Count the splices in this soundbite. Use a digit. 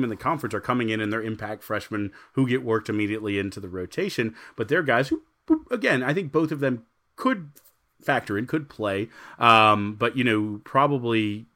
0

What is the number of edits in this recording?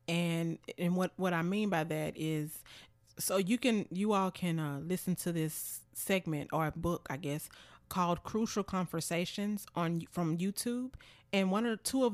1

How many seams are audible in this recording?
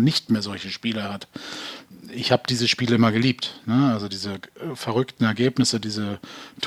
0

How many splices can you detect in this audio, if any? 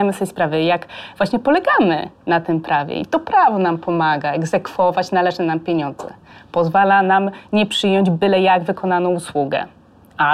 0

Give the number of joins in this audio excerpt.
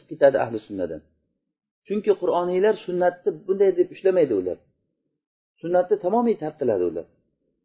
0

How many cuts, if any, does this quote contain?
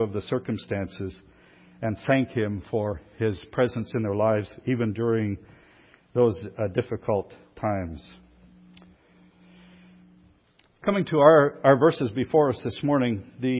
0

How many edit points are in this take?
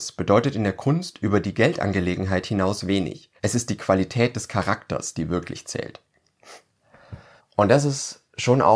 2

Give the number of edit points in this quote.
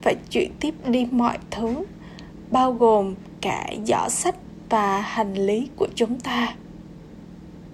0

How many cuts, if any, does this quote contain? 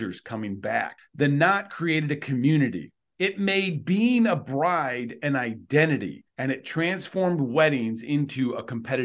1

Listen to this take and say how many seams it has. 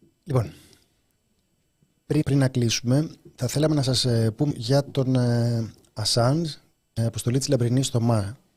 3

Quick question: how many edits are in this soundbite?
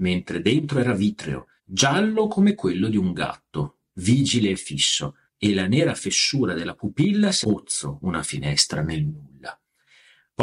3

